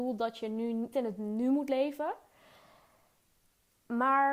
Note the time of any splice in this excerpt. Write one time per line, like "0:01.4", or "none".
0:00.9